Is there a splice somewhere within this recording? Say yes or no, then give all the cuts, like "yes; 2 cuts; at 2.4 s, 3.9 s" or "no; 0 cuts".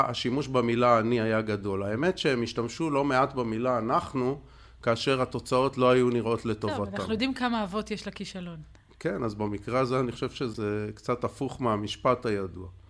no; 0 cuts